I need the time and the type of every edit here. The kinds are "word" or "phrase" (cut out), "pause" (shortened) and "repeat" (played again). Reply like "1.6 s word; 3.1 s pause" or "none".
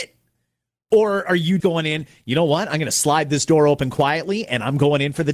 1.6 s word